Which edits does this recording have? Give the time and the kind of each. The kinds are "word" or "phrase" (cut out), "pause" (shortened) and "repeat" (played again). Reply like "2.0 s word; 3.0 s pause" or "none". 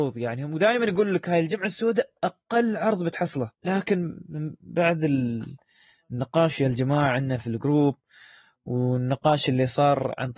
3.5 s pause